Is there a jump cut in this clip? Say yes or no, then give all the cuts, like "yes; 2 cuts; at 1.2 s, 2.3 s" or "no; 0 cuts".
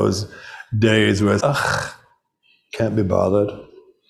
yes; 1 cut; at 1.4 s